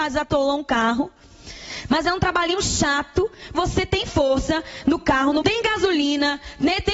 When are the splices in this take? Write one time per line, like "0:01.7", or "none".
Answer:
0:03.5
0:05.4